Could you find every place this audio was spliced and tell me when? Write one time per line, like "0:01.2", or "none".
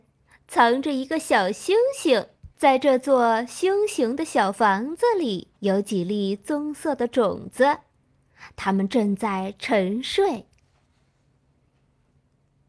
0:02.5
0:05.6